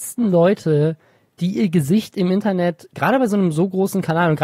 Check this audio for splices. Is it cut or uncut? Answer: uncut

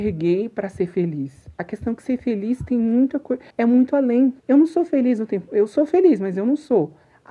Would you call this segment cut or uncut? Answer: cut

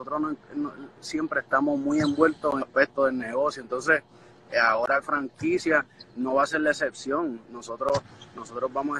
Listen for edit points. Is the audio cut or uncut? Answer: cut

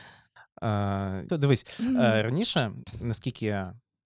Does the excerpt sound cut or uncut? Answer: cut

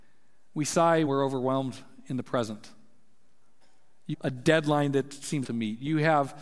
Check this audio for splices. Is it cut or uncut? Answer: cut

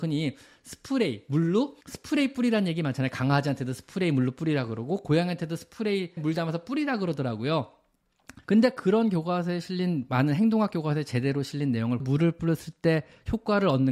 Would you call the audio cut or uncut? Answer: cut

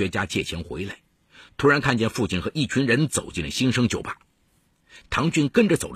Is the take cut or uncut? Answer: uncut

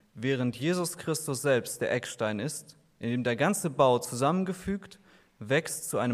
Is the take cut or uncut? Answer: uncut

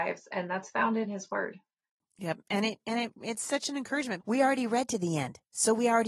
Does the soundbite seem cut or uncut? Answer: cut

